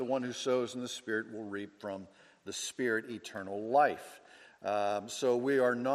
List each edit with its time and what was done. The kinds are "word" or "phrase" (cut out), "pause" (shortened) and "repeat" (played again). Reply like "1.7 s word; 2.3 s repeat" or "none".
none